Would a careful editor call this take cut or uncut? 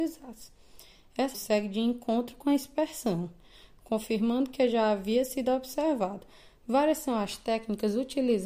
cut